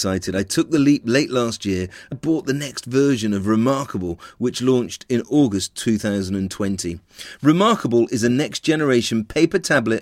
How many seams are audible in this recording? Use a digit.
1